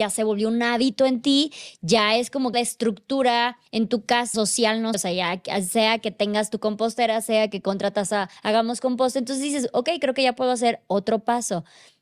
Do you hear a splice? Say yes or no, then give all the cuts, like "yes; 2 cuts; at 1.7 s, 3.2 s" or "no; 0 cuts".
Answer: yes; 5 cuts; at 2.5 s, 3.7 s, 4.3 s, 4.9 s, 8.4 s